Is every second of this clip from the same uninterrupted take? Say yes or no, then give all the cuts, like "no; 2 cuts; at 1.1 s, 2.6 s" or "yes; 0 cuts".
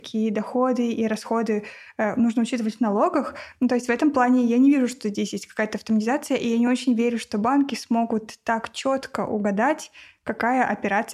yes; 0 cuts